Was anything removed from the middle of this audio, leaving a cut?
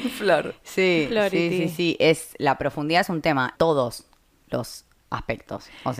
yes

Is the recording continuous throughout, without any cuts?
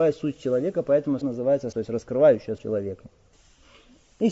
no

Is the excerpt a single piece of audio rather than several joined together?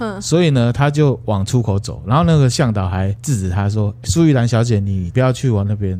no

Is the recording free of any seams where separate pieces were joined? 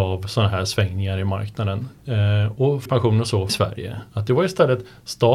no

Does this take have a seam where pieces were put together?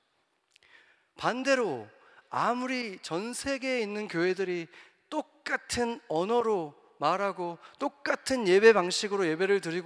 no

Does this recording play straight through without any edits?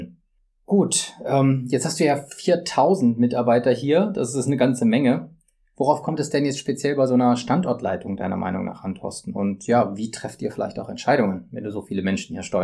yes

